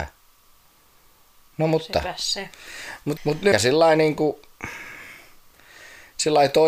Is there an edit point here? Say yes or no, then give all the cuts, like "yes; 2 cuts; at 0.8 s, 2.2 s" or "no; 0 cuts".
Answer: yes; 2 cuts; at 3.2 s, 3.5 s